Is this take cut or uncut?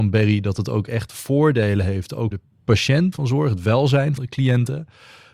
cut